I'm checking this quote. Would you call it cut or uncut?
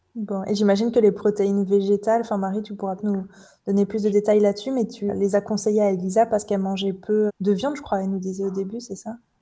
cut